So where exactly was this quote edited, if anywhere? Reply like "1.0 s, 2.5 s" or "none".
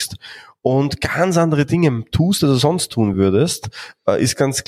none